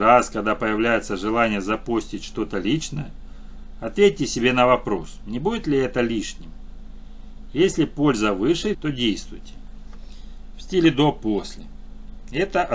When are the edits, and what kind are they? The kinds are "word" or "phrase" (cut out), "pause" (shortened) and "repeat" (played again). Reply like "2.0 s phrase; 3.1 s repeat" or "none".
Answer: 8.7 s word

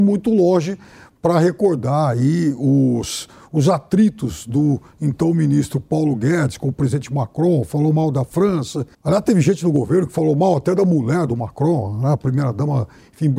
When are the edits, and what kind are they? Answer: 8.9 s pause

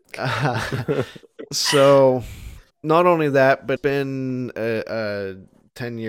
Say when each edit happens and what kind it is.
2.7 s pause; 3.8 s word

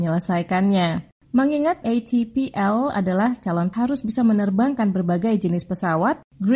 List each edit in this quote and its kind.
1.8 s word; 3.7 s word

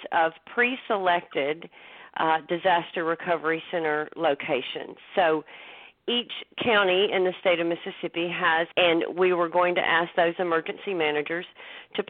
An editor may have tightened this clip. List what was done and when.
8.7 s phrase

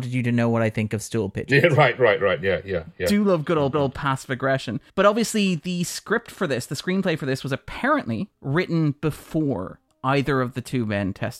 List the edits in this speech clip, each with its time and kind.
3.7 s repeat; 4.9 s pause; 8.3 s pause; 9.9 s pause

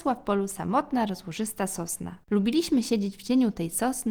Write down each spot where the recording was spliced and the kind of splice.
2.2 s pause

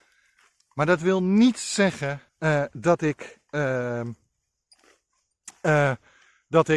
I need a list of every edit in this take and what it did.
2.3 s pause

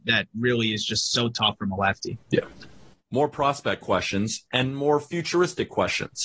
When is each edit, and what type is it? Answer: 2.2 s pause

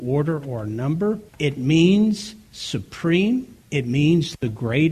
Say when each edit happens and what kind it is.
1.3 s pause; 3.6 s pause

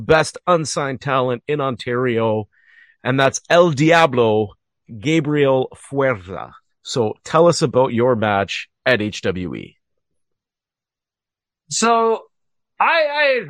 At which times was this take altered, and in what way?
none

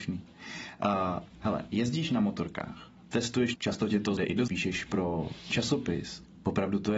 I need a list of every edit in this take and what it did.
1.3 s pause; 3.5 s phrase; 4.2 s word; 4.5 s word

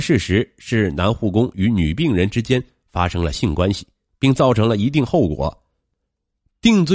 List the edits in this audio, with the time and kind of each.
none

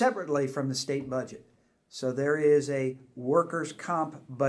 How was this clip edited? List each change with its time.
none

